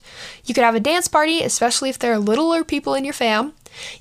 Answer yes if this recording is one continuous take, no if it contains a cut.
yes